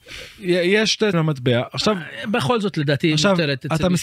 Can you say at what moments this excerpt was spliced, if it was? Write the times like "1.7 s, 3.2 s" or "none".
1.1 s, 2.7 s